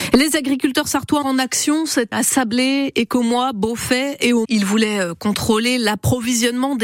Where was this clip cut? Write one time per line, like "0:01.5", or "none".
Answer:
0:01.2
0:02.1
0:04.4